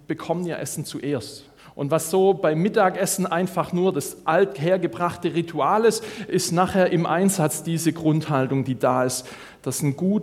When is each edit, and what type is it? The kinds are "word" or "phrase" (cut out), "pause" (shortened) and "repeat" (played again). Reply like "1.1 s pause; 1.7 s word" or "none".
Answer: 1.6 s pause